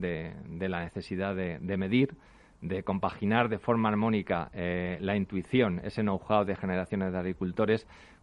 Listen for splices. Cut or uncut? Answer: uncut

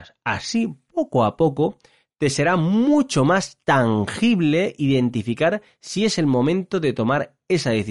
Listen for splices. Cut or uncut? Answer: uncut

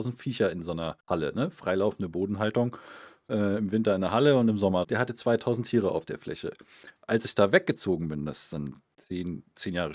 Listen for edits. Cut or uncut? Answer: cut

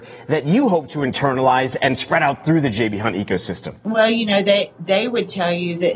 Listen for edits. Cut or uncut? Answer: cut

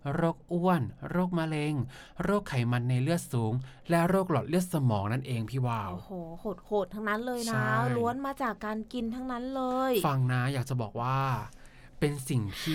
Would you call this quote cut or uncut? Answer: uncut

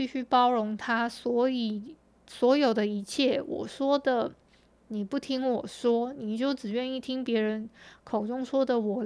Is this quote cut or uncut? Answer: uncut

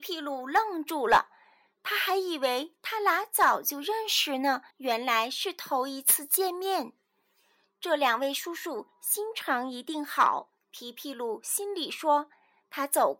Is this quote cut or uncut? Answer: cut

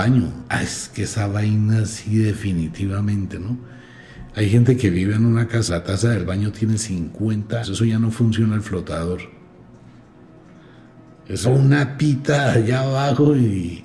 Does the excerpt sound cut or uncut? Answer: cut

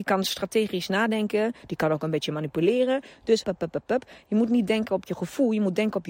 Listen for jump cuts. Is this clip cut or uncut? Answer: cut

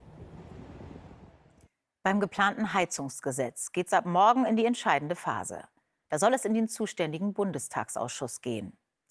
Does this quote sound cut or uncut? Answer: uncut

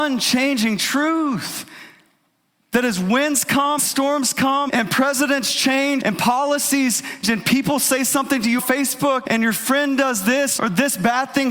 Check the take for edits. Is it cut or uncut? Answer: cut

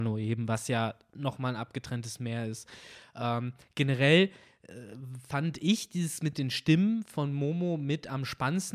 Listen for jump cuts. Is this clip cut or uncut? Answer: uncut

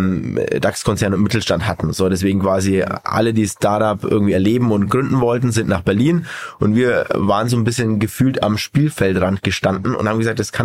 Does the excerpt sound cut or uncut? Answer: uncut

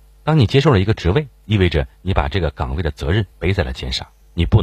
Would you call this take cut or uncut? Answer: cut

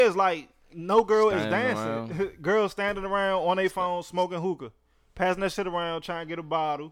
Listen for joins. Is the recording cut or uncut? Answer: uncut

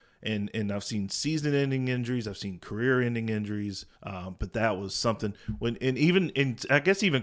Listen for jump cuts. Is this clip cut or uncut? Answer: cut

